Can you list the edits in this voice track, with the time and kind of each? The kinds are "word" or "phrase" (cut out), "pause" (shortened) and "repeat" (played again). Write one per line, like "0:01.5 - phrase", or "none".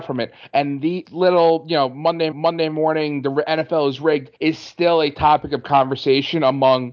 0:01.0 - phrase
0:02.3 - repeat
0:04.3 - pause